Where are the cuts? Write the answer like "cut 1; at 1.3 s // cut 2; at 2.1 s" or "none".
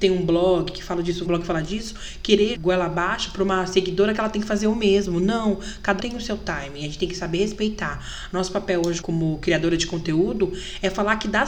cut 1; at 1.2 s // cut 2; at 2.5 s // cut 3; at 6.0 s // cut 4; at 9.0 s